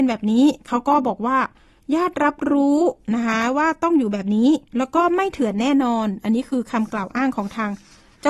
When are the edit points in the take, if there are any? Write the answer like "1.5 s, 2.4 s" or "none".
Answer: 4.7 s

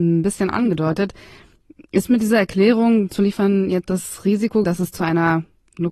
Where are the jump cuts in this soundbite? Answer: 3.1 s, 3.9 s, 4.6 s

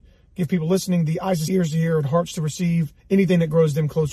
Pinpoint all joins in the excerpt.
1.5 s, 3.0 s

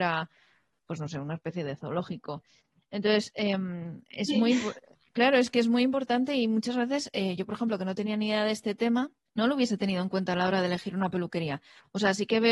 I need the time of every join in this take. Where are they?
none

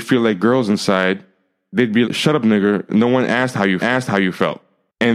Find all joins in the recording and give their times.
2.0 s, 3.8 s

